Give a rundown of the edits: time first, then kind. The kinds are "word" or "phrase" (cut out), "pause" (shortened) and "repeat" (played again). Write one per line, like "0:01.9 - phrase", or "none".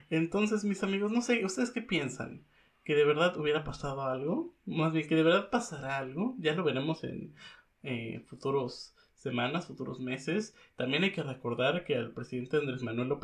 none

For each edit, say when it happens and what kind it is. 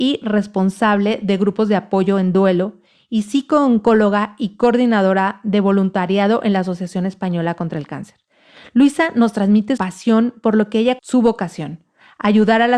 0:09.8 - word
0:11.0 - word

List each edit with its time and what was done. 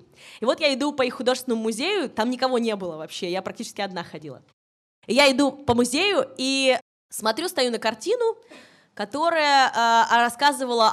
none

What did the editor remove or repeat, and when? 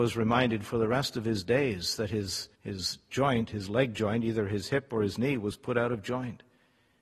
0:02.6 - pause

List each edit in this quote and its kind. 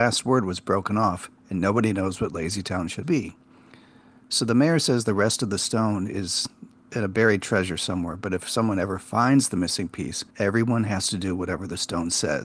0:03.0 - word
0:10.3 - pause

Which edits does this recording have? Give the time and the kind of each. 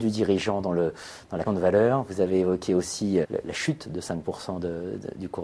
0:01.4 - word
0:03.2 - word

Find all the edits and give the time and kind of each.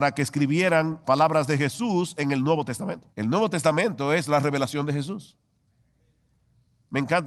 0:01.0 - word
0:03.1 - pause

